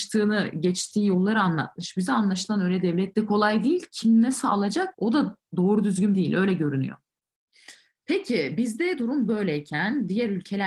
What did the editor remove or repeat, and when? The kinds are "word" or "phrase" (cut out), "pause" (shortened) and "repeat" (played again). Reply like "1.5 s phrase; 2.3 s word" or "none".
3.1 s phrase; 4.9 s pause; 6.1 s word